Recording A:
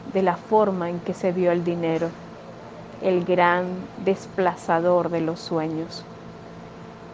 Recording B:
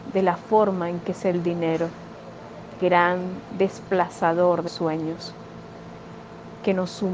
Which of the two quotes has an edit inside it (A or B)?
B